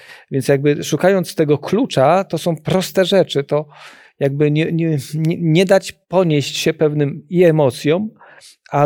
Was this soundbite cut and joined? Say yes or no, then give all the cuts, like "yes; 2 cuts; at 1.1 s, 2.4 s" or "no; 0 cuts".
yes; 1 cut; at 6.0 s